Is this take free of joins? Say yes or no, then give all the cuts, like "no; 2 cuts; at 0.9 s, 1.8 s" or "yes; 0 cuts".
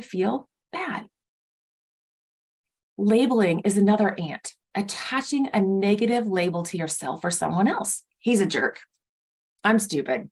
no; 2 cuts; at 4.6 s, 8.1 s